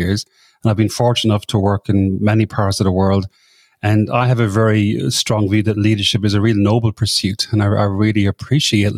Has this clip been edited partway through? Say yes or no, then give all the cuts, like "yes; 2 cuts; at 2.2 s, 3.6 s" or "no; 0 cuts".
no; 0 cuts